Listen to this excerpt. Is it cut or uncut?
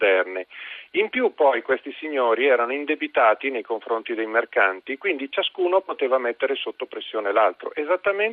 uncut